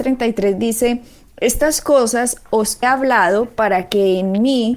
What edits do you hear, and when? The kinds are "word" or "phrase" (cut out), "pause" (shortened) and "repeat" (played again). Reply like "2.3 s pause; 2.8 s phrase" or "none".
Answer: 2.8 s word